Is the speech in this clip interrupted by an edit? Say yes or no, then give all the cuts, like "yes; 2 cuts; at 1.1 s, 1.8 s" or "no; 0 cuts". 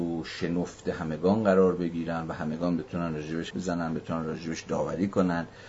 yes; 1 cut; at 3.5 s